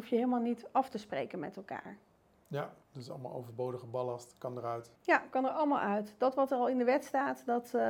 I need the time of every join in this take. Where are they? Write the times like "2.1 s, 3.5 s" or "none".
2.8 s, 5.0 s

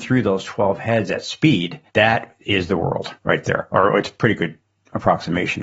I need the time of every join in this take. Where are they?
1.9 s, 3.2 s

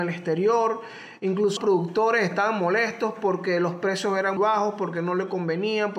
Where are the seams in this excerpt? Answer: 1.6 s, 4.4 s

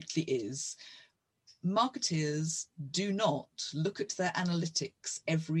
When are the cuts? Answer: none

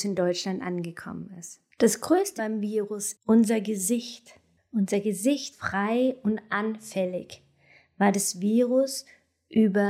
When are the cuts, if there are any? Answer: 1.7 s, 2.4 s, 3.1 s, 4.6 s, 5.5 s

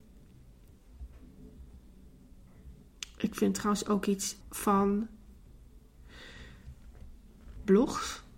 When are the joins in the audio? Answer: 4.4 s

